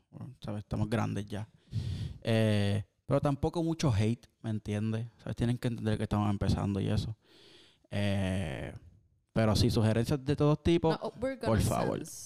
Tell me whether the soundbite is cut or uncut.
uncut